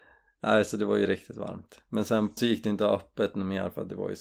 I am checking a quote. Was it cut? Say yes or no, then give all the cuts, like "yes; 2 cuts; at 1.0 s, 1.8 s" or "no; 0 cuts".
yes; 1 cut; at 2.4 s